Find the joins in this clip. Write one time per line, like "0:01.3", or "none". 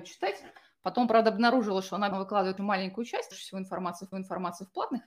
0:02.1
0:02.6
0:03.3
0:04.1